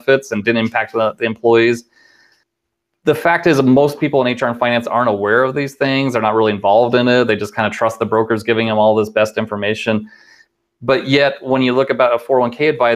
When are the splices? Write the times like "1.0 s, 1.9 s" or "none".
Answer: none